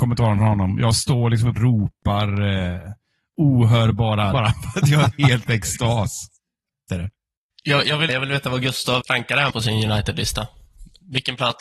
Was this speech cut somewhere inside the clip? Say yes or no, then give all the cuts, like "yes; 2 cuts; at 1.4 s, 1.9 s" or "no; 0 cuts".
yes; 6 cuts; at 1.6 s, 4.3 s, 6.9 s, 8.1 s, 9.0 s, 9.5 s